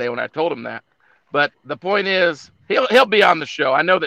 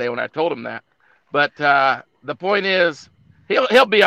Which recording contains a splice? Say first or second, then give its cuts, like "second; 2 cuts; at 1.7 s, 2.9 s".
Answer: first; 2 cuts; at 1.5 s, 2.6 s